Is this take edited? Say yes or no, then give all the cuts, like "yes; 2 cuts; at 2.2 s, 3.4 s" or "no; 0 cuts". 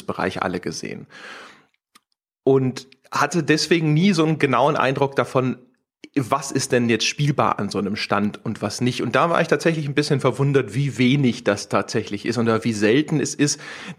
no; 0 cuts